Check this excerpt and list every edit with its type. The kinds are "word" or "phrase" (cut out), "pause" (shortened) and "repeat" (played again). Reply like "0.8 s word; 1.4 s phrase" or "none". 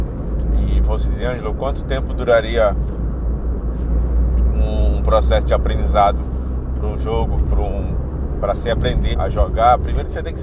1.2 s word; 9.1 s word